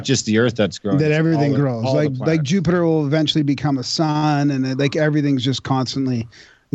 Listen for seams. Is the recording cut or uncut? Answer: uncut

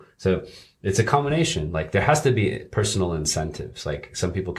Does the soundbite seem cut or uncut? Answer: uncut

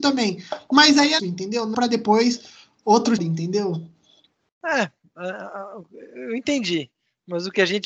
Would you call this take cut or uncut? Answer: cut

